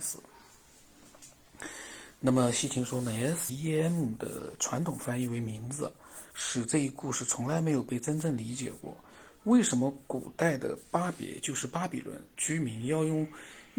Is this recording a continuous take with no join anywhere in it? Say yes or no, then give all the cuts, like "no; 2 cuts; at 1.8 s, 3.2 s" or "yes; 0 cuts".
no; 3 cuts; at 3.5 s, 6.3 s, 12.3 s